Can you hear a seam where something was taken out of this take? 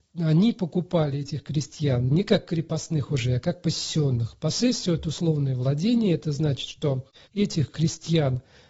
no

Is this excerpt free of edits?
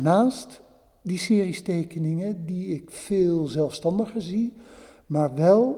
yes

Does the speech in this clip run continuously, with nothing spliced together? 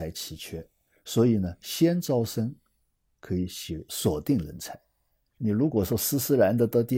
yes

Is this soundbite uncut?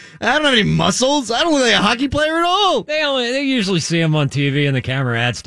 yes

